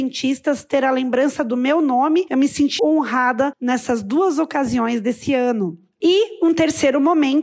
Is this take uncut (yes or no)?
no